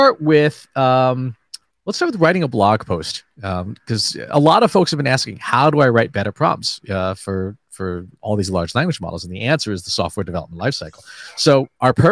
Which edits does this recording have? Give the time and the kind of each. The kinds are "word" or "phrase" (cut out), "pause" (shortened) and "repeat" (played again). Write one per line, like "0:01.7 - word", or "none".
0:01.7 - pause